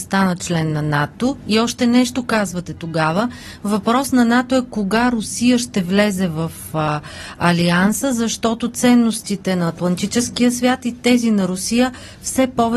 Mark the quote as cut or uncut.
uncut